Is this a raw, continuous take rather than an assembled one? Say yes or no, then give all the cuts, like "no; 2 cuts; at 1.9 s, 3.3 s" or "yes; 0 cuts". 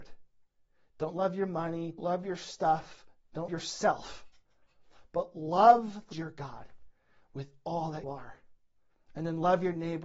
no; 4 cuts; at 2.0 s, 3.5 s, 6.1 s, 8.0 s